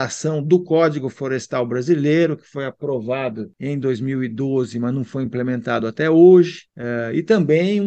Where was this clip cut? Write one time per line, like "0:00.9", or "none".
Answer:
none